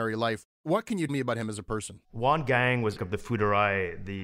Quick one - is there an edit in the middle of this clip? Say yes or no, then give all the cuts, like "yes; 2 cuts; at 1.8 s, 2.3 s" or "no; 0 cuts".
yes; 3 cuts; at 1.1 s, 2.0 s, 3.0 s